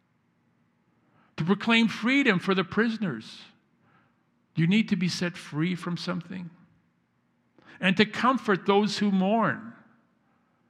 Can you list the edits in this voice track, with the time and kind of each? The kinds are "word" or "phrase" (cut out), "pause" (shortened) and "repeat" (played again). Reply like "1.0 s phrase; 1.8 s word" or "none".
none